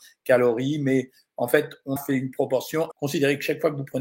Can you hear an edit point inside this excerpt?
yes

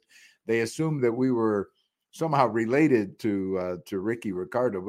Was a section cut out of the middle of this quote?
no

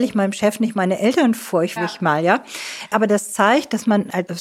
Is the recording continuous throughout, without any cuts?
no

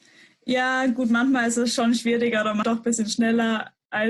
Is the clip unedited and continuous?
no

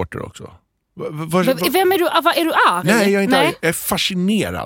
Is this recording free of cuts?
yes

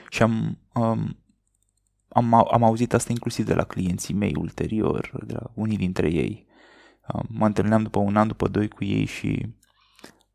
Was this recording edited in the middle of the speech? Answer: no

